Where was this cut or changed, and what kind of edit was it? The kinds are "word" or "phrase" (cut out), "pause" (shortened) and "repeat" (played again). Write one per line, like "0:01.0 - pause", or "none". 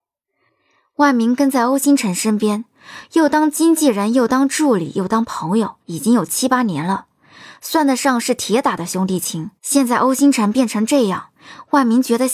0:05.8 - pause
0:09.6 - pause